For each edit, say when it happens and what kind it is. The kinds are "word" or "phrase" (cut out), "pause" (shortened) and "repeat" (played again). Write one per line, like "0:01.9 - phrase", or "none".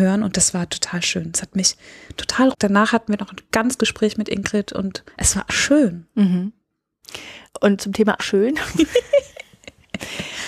0:02.5 - phrase
0:03.8 - word
0:05.1 - pause
0:05.5 - word
0:07.5 - pause
0:08.2 - word